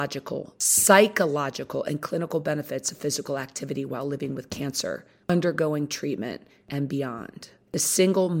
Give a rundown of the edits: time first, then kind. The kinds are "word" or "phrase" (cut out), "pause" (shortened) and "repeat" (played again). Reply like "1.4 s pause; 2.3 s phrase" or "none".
none